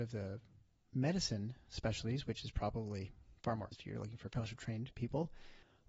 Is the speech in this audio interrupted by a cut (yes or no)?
yes